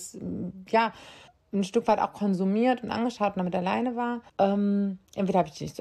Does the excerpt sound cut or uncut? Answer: cut